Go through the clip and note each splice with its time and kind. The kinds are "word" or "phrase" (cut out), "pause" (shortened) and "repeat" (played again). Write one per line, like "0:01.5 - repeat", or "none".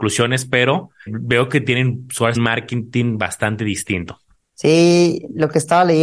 0:01.1 - word
0:02.4 - phrase